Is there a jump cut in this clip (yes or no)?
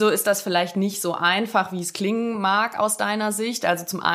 no